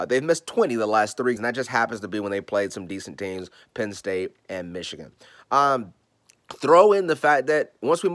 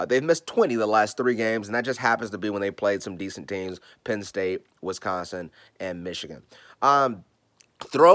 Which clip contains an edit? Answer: first; 2 cuts; at 1.4 s, 4.4 s

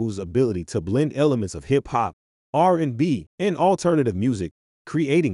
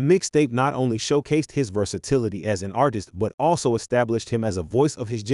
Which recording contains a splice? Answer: first; 1 cut; at 3.3 s

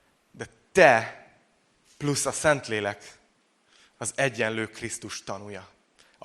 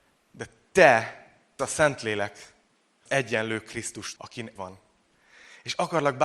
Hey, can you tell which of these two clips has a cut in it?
second; 4 cuts; at 1.6 s, 3.1 s, 4.2 s, 4.6 s

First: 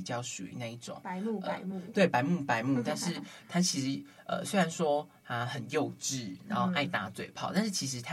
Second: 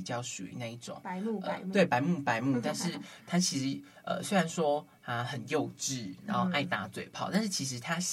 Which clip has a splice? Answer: second; 1 cut; at 1.7 s

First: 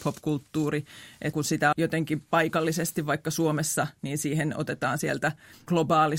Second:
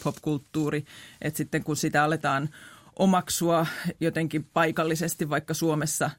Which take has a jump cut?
first; 2 cuts; at 1.3 s, 1.7 s

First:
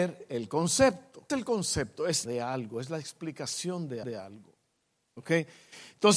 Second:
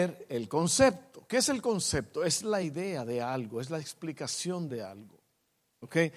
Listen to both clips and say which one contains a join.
first; 3 cuts; at 1.3 s, 2.2 s, 4.0 s

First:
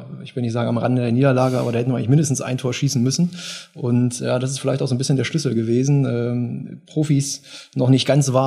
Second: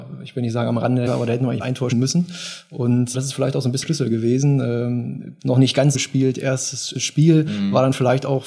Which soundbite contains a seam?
second; 8 cuts; at 1.1 s, 1.6 s, 1.9 s, 3.1 s, 3.8 s, 5.4 s, 5.9 s, 6.9 s

